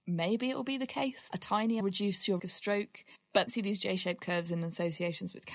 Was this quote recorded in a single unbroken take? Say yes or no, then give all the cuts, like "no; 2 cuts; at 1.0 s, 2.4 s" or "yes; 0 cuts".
no; 4 cuts; at 1.3 s, 1.8 s, 2.4 s, 3.5 s